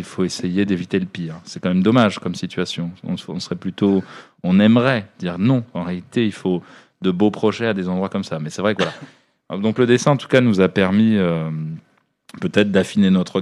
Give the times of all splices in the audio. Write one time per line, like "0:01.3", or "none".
none